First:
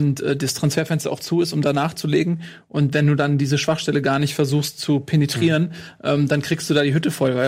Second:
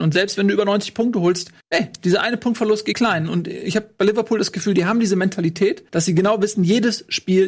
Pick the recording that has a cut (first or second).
second